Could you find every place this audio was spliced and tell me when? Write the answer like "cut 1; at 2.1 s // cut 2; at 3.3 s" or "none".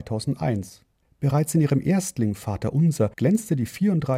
cut 1; at 1.0 s // cut 2; at 3.1 s